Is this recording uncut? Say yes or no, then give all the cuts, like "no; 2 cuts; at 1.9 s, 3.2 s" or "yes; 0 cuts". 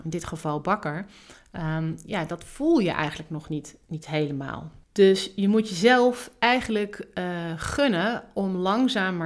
no; 1 cut; at 4.8 s